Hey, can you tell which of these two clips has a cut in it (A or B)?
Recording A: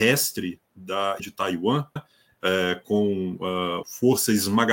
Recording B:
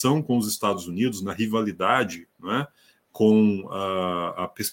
A